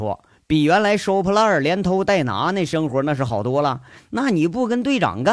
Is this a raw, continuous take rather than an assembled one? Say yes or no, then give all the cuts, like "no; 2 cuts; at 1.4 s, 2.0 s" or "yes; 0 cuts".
yes; 0 cuts